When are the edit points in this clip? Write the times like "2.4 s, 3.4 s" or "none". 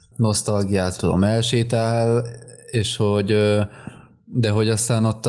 1.0 s